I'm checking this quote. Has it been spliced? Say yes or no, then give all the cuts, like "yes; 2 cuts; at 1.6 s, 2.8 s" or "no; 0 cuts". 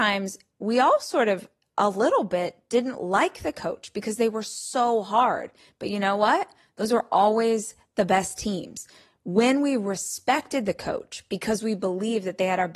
no; 0 cuts